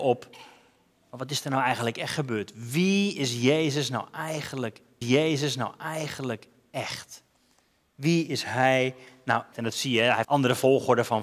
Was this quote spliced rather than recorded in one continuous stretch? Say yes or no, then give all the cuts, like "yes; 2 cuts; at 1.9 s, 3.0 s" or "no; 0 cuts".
yes; 3 cuts; at 5.0 s, 9.5 s, 10.2 s